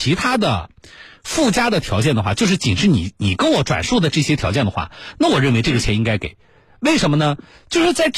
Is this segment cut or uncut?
uncut